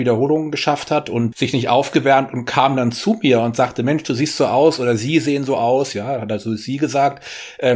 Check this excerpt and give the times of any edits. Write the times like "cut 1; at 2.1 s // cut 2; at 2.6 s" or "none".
cut 1; at 1.3 s